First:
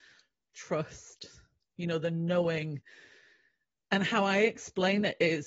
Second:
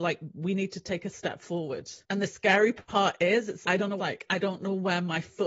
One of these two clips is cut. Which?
second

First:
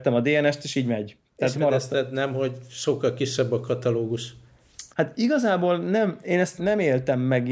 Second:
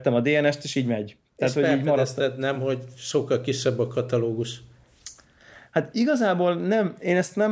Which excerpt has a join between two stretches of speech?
first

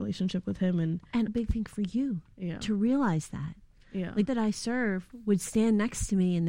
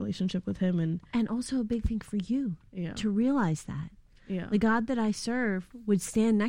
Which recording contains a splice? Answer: first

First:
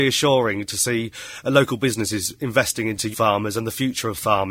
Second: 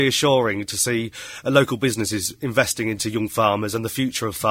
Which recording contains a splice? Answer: first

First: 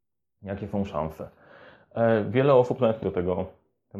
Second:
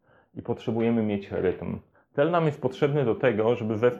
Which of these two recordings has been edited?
first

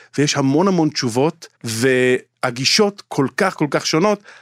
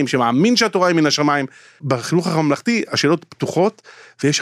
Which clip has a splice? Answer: first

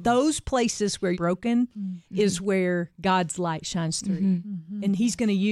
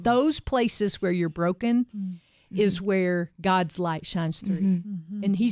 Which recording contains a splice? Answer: first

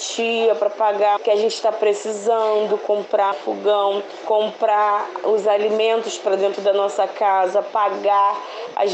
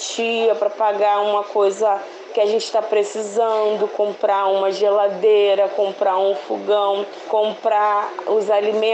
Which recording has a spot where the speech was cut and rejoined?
first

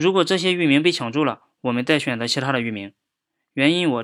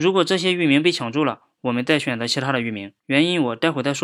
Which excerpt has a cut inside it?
second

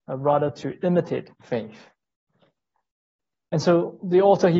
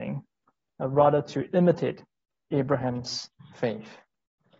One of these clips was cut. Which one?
first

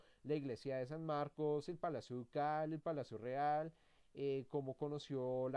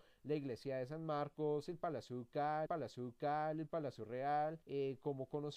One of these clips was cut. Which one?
second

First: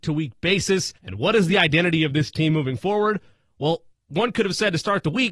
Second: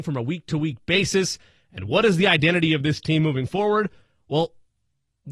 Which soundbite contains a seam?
first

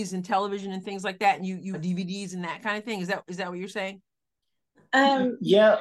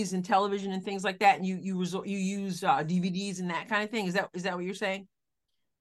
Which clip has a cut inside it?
first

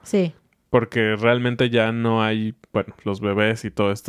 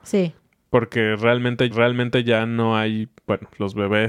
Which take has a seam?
second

